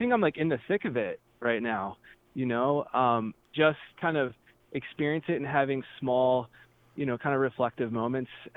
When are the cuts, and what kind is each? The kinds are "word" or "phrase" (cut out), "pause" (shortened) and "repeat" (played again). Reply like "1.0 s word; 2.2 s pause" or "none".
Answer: 3.4 s pause